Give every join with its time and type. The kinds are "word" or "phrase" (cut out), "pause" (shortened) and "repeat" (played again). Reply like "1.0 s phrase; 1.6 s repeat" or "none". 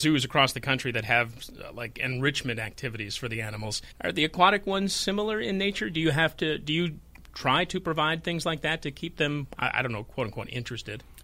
3.9 s pause

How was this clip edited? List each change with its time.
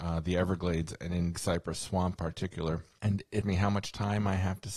1.3 s word; 2.1 s word; 3.4 s word

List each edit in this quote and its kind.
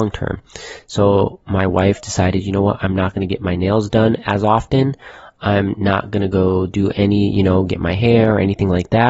none

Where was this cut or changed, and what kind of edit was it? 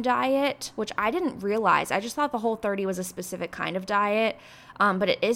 none

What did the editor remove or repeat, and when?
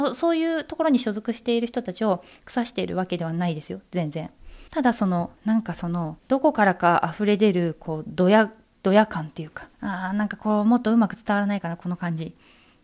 4.7 s pause; 5.3 s pause; 6.2 s pause; 9.7 s pause

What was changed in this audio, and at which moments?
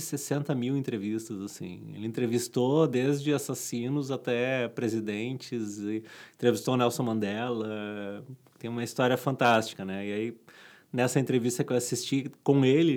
none

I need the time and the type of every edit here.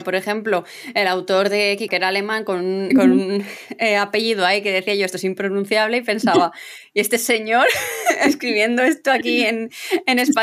1.9 s word; 2.9 s word

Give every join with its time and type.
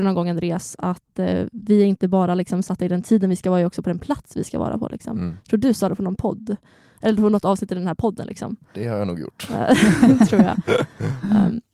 none

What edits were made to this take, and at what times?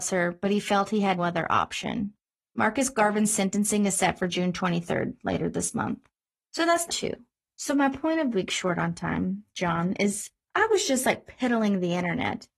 1.2 s word; 6.9 s word; 8.3 s word

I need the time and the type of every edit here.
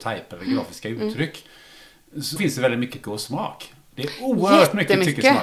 2.4 s word; 3.0 s word

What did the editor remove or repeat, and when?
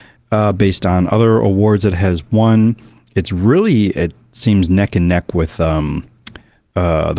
none

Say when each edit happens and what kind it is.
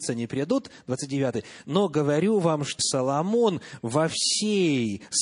2.8 s word

